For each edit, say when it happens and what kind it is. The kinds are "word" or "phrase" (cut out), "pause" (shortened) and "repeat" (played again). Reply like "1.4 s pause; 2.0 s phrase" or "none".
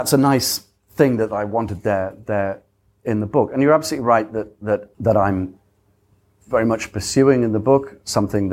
none